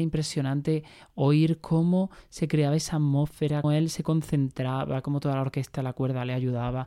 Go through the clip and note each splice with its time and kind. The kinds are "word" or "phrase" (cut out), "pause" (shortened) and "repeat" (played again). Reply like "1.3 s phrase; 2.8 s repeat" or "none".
3.6 s word